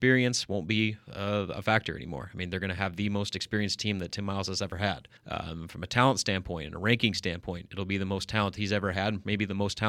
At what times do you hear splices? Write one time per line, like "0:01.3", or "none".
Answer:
0:05.2

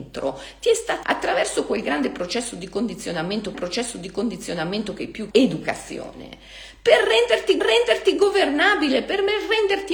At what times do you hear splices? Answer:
0:01.0
0:03.5
0:05.3
0:07.6

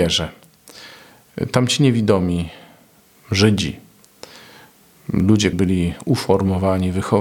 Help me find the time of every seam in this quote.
0:05.5

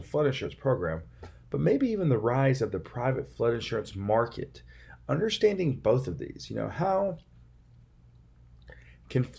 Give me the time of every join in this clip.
none

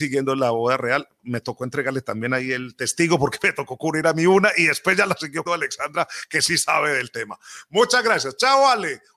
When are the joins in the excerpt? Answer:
0:01.2
0:05.5

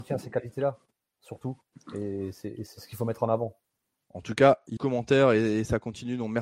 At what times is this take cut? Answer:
0:04.8

